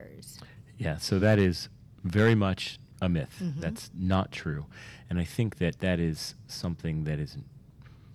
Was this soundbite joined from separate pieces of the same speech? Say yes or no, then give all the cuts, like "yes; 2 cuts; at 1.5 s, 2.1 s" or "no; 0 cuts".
no; 0 cuts